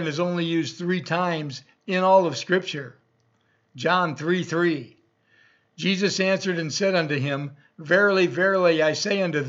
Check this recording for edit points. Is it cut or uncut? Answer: uncut